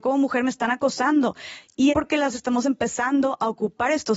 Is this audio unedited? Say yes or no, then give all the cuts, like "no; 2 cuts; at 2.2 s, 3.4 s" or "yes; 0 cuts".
no; 2 cuts; at 1.9 s, 2.3 s